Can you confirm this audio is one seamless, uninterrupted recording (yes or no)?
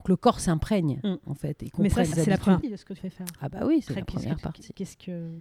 no